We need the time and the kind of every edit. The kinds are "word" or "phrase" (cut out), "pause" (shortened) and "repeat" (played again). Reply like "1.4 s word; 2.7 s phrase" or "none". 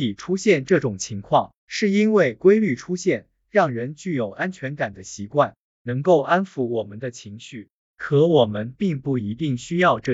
1.6 s pause

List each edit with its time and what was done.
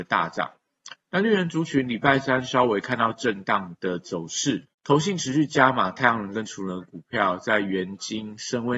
1.0 s pause; 4.7 s pause

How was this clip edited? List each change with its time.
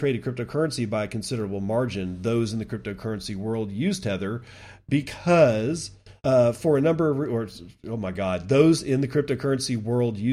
6.2 s pause

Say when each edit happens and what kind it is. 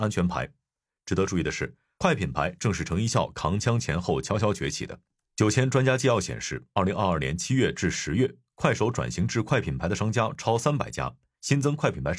none

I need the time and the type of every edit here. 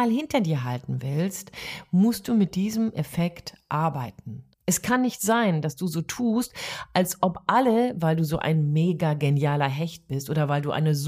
4.5 s pause

